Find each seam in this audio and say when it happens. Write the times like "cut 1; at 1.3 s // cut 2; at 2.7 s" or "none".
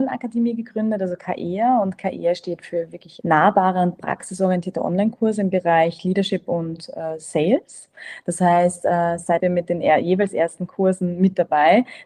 cut 1; at 3.2 s // cut 2; at 9.4 s